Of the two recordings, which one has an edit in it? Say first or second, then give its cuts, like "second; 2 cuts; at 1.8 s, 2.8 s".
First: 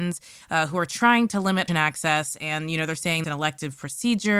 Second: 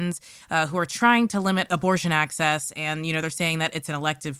first; 2 cuts; at 1.7 s, 3.2 s